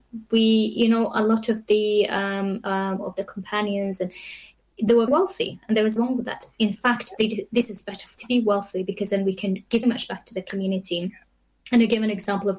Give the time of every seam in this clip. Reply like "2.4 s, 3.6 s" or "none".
5.1 s, 6.0 s, 8.1 s, 9.8 s